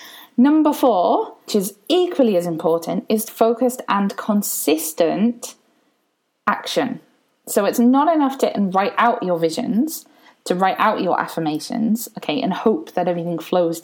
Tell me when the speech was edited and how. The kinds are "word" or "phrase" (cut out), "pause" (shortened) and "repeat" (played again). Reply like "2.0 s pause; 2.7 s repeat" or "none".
1.5 s word; 3.3 s word; 8.4 s word